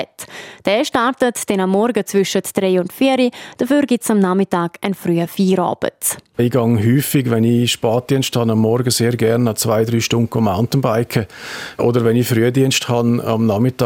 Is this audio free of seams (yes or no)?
yes